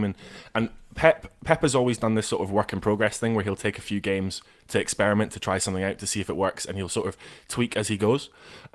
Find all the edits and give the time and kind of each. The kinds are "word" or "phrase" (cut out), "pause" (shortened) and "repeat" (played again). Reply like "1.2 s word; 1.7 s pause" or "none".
none